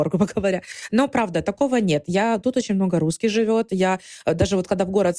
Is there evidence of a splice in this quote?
no; 0 cuts

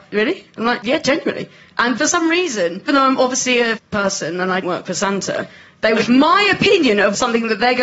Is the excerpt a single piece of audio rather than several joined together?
no; 4 cuts; at 2.9 s, 3.8 s, 4.6 s, 6.1 s

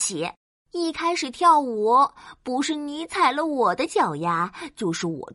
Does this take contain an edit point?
no; 0 cuts

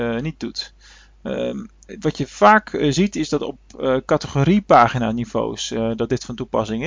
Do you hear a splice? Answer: no; 0 cuts

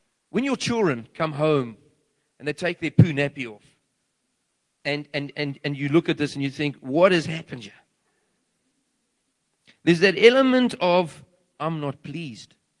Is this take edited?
no; 0 cuts

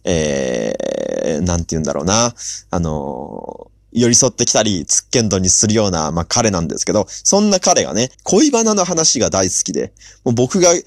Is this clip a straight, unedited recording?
no; 1 cut; at 8.1 s

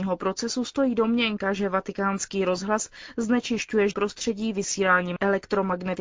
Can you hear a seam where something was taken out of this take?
yes; 1 cut; at 3.9 s

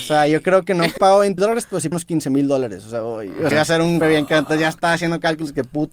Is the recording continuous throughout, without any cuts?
no; 5 cuts; at 1.0 s, 1.4 s, 1.9 s, 3.5 s, 4.0 s

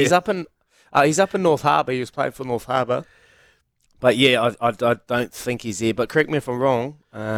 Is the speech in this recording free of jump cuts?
yes; 0 cuts

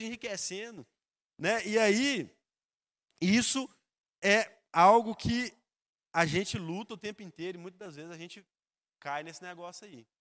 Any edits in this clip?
no; 0 cuts

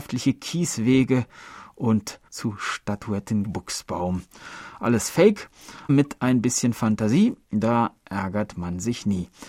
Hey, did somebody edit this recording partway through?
yes; 4 cuts; at 2.3 s, 3.4 s, 5.9 s, 7.4 s

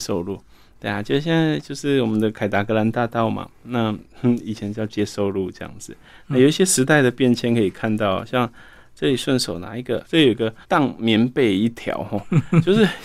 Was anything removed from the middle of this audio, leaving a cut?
yes; 2 cuts; at 10.0 s, 10.6 s

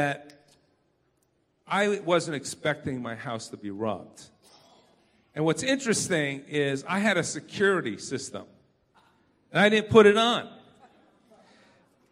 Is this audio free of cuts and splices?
yes; 0 cuts

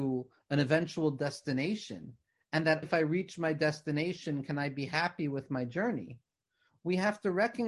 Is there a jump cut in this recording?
yes; 2 cuts; at 2.2 s, 2.8 s

